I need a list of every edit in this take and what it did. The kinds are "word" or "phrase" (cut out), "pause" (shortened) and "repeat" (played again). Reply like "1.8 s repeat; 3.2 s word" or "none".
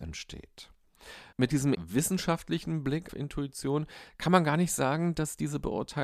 1.3 s pause; 1.7 s word; 3.1 s word